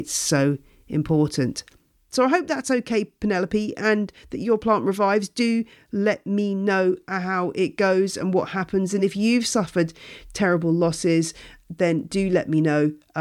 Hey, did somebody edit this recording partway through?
no; 0 cuts

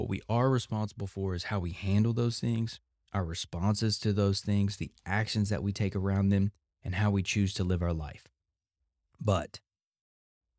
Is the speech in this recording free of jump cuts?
yes; 0 cuts

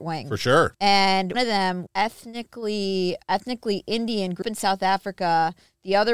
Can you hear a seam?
yes; 3 cuts; at 1.3 s, 1.9 s, 4.4 s

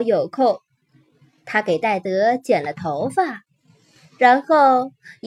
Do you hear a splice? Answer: no; 0 cuts

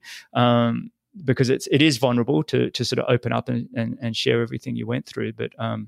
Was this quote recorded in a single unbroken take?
yes; 0 cuts

